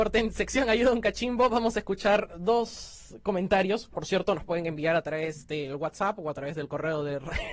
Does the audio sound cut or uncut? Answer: uncut